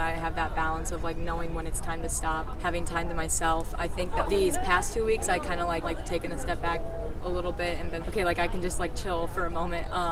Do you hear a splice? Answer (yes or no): yes